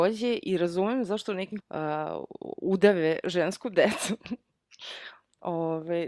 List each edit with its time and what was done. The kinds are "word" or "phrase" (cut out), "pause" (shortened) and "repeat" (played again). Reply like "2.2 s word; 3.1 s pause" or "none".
1.6 s word